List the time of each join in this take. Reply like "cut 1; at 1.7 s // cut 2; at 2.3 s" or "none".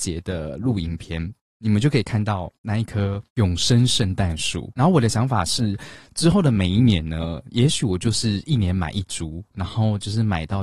cut 1; at 1.4 s // cut 2; at 3.3 s